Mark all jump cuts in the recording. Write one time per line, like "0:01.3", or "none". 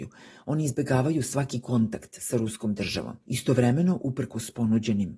0:03.2

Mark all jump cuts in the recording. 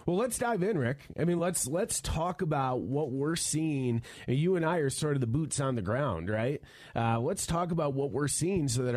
none

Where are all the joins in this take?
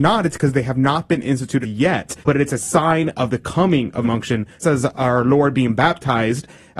0:01.6
0:02.2
0:04.0
0:04.6

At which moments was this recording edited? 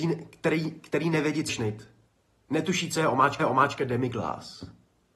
0:01.5
0:02.2
0:03.4

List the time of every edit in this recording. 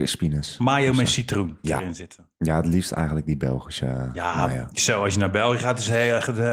0:01.6

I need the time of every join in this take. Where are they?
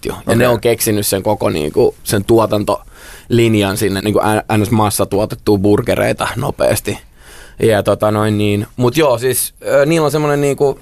0:02.0
0:04.0

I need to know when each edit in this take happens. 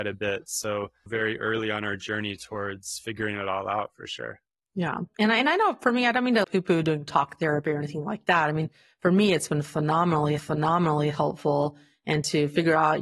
0:01.1
0:06.4
0:10.4

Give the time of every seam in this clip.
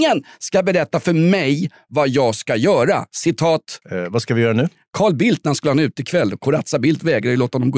0:03.8

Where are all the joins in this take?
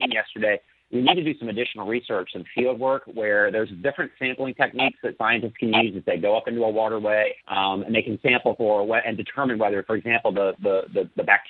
0:07.4

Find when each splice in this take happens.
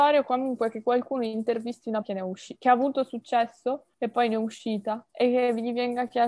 0:02.0
0:03.9
0:05.1

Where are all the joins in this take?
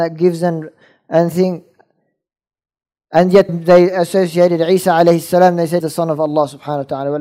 0:03.5
0:05.8

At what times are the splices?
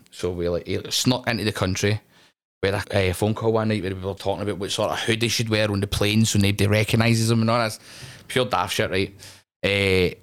0:02.8
0:04.2

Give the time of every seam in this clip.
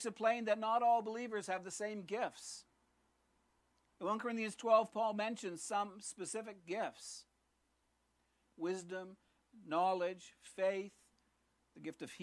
none

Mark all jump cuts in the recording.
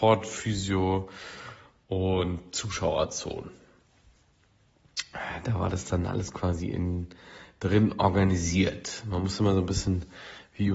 none

